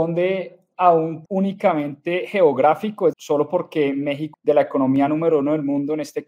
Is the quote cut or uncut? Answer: cut